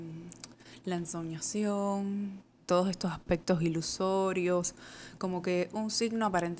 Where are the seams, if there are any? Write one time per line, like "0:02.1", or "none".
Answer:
0:02.6